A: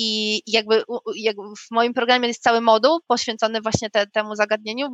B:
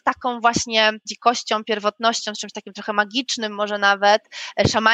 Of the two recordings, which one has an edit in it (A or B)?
B